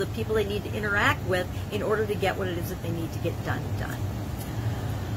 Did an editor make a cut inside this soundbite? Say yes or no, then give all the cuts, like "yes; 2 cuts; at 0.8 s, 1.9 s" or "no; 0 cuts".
no; 0 cuts